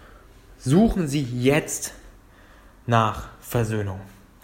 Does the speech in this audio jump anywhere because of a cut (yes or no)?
no